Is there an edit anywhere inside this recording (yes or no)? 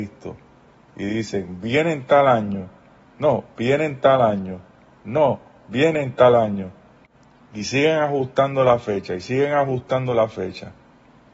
no